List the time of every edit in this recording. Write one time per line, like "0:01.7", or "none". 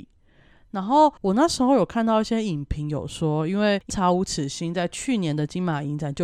0:01.2